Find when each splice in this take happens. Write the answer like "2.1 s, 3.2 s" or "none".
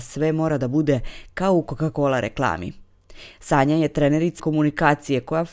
4.4 s